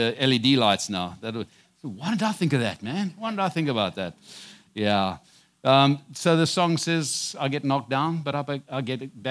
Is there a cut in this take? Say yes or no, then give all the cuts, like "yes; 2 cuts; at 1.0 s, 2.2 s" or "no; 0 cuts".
no; 0 cuts